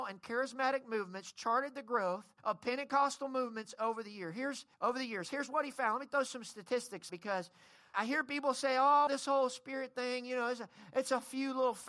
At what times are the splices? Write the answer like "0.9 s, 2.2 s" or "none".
2.4 s, 4.7 s, 7.1 s, 7.9 s, 9.1 s